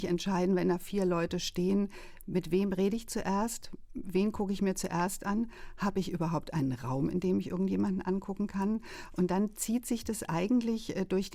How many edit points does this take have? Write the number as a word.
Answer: zero